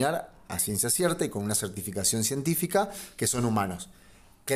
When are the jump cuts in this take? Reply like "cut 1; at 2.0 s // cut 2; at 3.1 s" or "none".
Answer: none

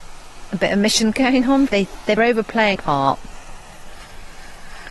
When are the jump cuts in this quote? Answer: cut 1; at 1.1 s // cut 2; at 1.7 s // cut 3; at 2.2 s // cut 4; at 2.8 s

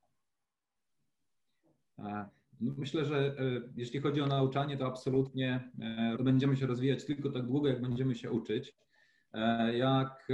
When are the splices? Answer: cut 1; at 6.2 s

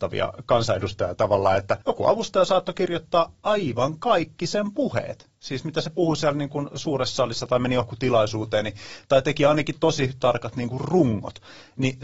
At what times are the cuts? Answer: cut 1; at 1.8 s

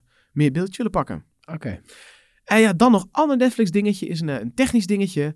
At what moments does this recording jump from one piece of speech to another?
none

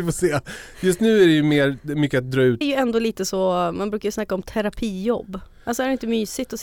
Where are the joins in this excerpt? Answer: cut 1; at 2.6 s

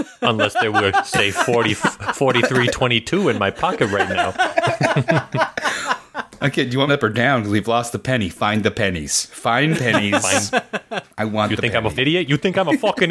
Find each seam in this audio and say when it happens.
cut 1; at 6.9 s // cut 2; at 9.7 s // cut 3; at 12.0 s

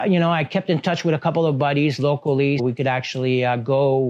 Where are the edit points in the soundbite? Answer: cut 1; at 2.6 s

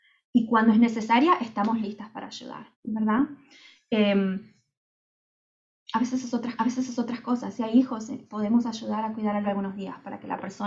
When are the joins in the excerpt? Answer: cut 1; at 2.7 s // cut 2; at 6.6 s // cut 3; at 8.3 s // cut 4; at 9.4 s

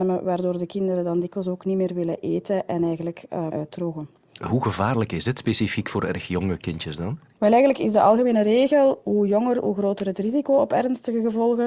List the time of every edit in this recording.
cut 1; at 3.5 s

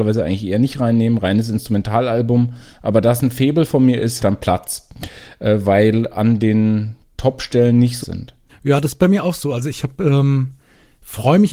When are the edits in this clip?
cut 1; at 4.2 s // cut 2; at 8.0 s // cut 3; at 8.5 s

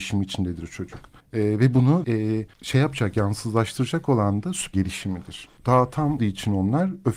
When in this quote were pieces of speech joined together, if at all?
cut 1; at 1.2 s // cut 2; at 2.0 s // cut 3; at 2.5 s // cut 4; at 4.7 s // cut 5; at 5.6 s // cut 6; at 6.2 s

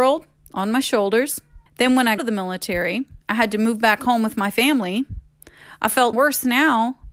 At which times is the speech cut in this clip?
cut 1; at 1.7 s // cut 2; at 2.2 s // cut 3; at 3.2 s // cut 4; at 6.1 s

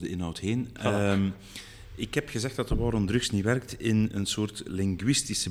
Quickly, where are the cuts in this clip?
none

